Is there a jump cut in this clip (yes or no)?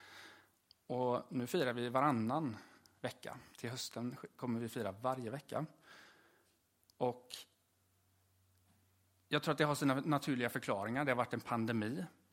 yes